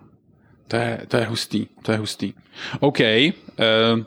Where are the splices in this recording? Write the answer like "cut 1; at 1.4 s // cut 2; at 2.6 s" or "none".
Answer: none